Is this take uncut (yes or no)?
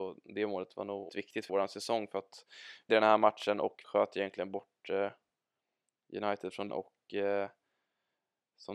no